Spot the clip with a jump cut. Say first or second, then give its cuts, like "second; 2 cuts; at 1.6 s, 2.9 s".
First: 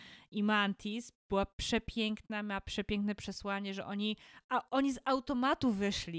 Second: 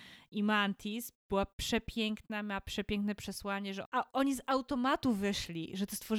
second; 1 cut; at 3.9 s